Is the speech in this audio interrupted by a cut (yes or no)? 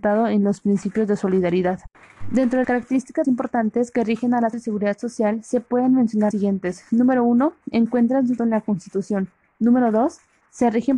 yes